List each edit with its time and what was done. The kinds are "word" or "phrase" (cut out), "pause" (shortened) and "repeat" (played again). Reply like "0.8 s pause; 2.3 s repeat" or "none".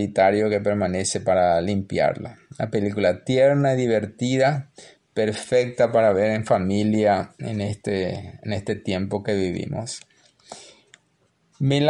none